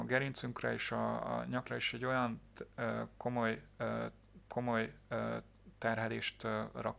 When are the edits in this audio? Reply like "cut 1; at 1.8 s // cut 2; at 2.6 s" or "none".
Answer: cut 1; at 1.7 s // cut 2; at 4.5 s